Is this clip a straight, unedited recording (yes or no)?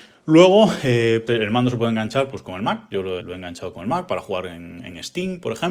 no